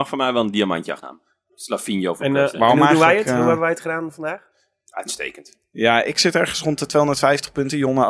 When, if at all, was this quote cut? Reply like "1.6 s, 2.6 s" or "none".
1.0 s